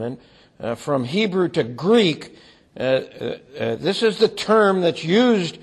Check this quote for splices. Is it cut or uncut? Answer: uncut